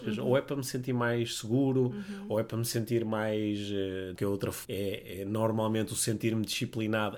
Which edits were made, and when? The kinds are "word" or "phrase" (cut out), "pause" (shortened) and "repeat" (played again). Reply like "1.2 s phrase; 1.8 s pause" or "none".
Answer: 4.2 s word; 4.6 s word